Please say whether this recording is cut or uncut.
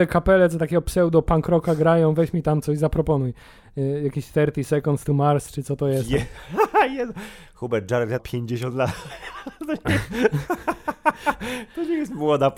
cut